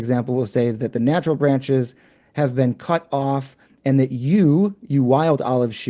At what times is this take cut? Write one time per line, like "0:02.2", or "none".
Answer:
none